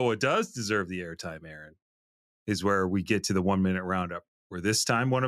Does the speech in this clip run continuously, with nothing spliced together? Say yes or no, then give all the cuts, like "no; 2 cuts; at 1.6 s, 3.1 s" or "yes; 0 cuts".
no; 1 cut; at 4.3 s